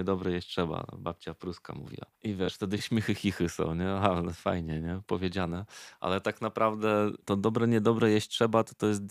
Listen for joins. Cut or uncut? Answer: cut